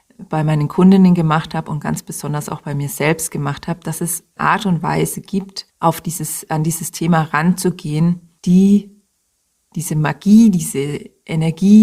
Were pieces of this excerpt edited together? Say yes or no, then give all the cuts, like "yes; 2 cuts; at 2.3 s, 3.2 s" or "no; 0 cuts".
yes; 3 cuts; at 4.4 s, 5.7 s, 8.4 s